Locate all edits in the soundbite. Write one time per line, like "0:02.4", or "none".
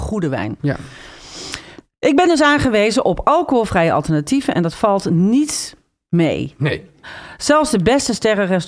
none